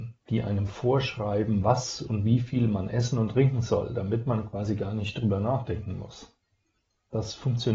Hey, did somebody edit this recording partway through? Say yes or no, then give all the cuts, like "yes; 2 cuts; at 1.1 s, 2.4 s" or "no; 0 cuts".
no; 0 cuts